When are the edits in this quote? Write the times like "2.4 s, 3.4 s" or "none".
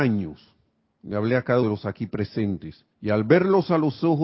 1.6 s, 2.9 s